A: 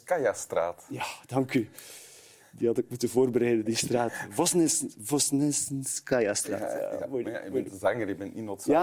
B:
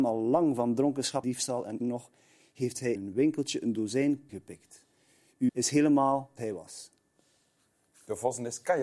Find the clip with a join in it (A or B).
B